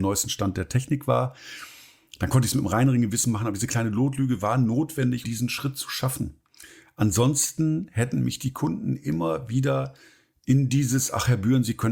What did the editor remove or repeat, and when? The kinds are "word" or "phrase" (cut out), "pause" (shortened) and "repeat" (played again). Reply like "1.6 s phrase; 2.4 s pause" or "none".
5.2 s word